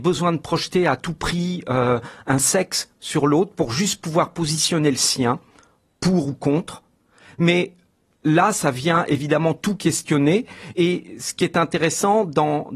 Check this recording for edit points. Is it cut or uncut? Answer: uncut